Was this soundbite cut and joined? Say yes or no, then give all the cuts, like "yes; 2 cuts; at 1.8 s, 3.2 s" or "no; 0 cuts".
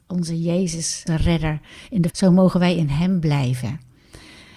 yes; 2 cuts; at 1.1 s, 2.1 s